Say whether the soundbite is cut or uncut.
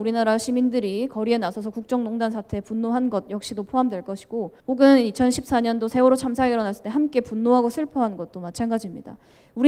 cut